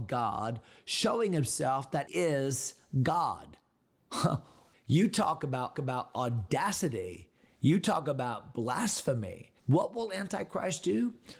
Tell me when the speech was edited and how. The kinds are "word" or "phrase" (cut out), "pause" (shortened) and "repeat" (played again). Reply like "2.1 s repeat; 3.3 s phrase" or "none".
2.1 s word; 4.7 s word; 5.7 s repeat; 9.6 s pause